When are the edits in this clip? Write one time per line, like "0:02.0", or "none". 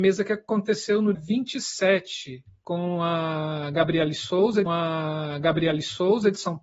0:01.1
0:04.7